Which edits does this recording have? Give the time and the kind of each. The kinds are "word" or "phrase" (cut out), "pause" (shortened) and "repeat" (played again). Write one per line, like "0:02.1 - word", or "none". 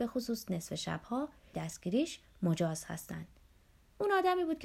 0:01.5 - phrase